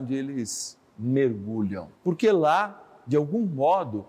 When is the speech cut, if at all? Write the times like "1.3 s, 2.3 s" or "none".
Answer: 2.0 s